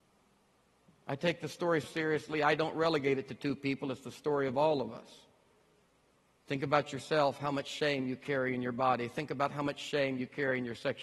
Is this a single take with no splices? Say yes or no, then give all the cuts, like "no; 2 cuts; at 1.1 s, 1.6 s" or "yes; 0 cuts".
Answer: no; 1 cut; at 1.8 s